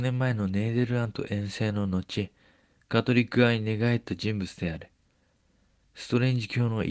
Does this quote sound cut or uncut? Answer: uncut